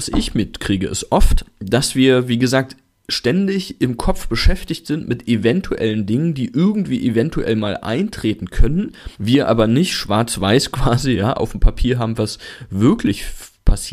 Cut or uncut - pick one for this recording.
cut